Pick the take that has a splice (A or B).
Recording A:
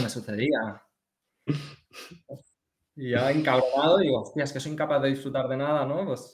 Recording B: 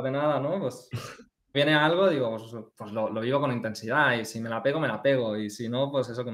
B